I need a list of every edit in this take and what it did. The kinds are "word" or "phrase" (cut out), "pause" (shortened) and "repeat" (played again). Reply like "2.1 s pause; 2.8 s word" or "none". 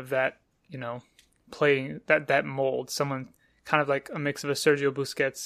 none